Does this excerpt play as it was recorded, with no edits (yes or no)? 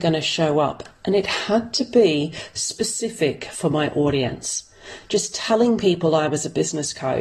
yes